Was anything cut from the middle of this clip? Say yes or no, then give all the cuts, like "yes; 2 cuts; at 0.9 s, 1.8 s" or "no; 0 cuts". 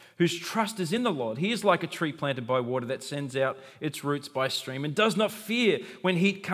no; 0 cuts